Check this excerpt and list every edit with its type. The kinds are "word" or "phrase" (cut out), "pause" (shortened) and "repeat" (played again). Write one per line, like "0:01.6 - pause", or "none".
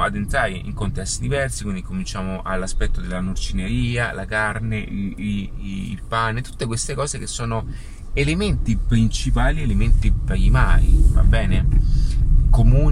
none